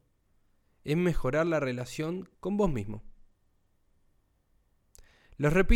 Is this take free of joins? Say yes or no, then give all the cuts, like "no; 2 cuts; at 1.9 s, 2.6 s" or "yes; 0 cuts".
no; 1 cut; at 2.3 s